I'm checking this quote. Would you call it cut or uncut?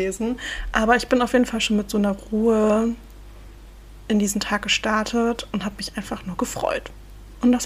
uncut